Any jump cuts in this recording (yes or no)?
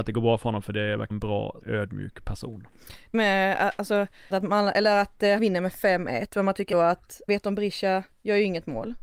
yes